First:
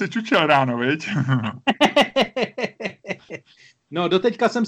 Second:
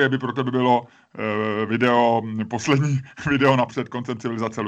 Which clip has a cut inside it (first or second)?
second